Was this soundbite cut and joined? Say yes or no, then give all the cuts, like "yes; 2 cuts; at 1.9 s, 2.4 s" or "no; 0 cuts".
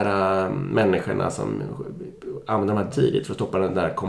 yes; 1 cut; at 2.9 s